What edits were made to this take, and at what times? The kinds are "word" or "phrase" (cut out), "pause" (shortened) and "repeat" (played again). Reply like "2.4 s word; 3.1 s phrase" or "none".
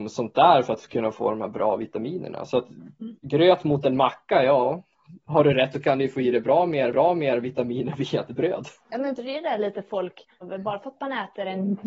3.2 s pause; 5.7 s word; 6.9 s repeat; 8.8 s pause; 9.2 s word; 10.4 s word

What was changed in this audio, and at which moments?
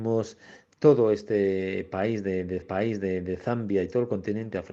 2.6 s repeat

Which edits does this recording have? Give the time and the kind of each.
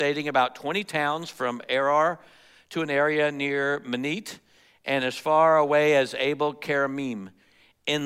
none

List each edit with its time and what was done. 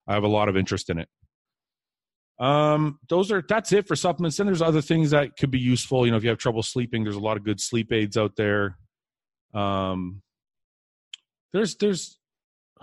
none

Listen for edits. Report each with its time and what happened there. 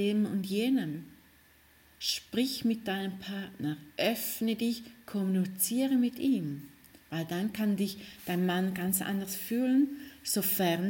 none

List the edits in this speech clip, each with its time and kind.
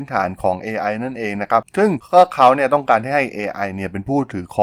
none

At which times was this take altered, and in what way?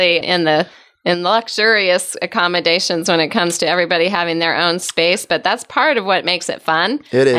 none

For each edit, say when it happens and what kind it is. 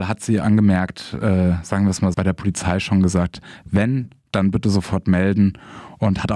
2.1 s word

